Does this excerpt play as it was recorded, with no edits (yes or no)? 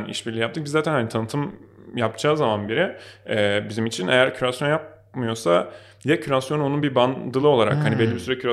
yes